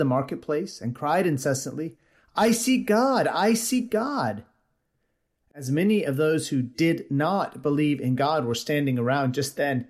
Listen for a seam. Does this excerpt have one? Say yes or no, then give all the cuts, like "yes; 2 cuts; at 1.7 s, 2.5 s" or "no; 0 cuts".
no; 0 cuts